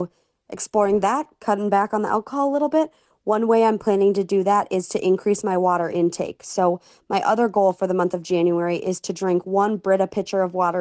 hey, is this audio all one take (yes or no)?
yes